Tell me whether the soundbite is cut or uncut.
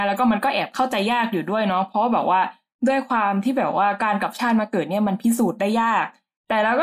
uncut